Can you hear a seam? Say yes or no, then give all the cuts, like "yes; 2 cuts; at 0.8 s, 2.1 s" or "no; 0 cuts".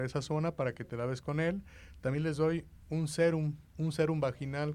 yes; 1 cut; at 3.7 s